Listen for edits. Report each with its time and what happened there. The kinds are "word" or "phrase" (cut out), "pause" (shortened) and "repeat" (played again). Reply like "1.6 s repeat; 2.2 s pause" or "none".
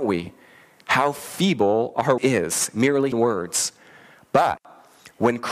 2.2 s word; 3.1 s word